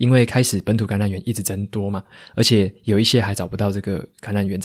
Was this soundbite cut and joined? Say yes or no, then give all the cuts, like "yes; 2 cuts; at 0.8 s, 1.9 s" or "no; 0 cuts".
no; 0 cuts